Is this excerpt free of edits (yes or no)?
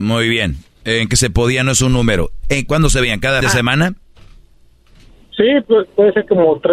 no